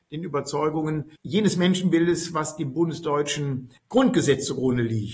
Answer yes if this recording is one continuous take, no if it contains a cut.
no